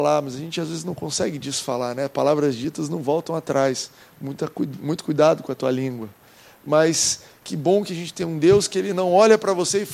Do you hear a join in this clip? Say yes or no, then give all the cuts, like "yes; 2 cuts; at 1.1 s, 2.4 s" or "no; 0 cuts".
no; 0 cuts